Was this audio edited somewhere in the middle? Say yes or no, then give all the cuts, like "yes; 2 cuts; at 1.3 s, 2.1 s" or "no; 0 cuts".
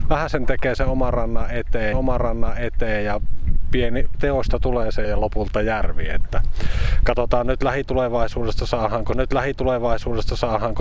yes; 4 cuts; at 1.9 s, 4.1 s, 5.0 s, 9.1 s